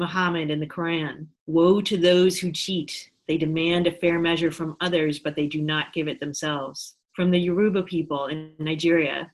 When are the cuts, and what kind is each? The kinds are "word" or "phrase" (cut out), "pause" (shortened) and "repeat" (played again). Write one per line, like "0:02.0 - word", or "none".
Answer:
0:01.3 - pause
0:07.0 - pause